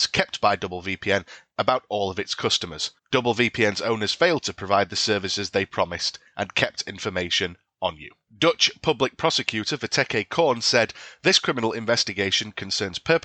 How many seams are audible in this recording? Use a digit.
1